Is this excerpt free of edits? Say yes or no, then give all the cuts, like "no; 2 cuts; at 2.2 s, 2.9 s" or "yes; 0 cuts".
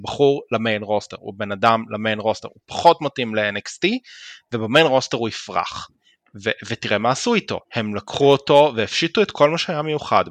no; 1 cut; at 7.6 s